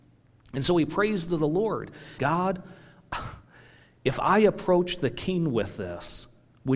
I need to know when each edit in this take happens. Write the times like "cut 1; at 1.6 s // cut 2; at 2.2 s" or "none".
cut 1; at 2.2 s